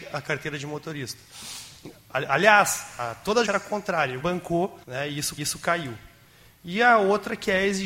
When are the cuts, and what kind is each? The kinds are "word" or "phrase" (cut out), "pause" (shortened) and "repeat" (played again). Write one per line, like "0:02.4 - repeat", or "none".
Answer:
0:03.5 - word
0:04.2 - phrase
0:04.8 - pause
0:05.4 - repeat